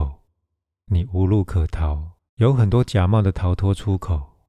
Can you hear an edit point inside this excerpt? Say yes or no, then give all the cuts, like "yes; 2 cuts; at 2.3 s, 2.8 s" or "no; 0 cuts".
yes; 1 cut; at 2.3 s